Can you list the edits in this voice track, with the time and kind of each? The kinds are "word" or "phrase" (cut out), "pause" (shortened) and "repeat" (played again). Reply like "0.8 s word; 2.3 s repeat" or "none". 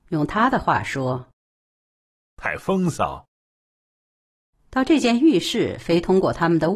none